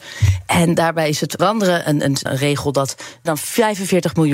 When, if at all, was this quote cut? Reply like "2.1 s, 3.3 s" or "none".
1.4 s, 2.3 s, 3.3 s